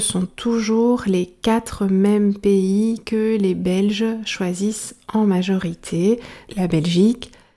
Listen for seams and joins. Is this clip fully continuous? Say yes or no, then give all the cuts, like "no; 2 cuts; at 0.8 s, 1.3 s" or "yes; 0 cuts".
no; 1 cut; at 6.5 s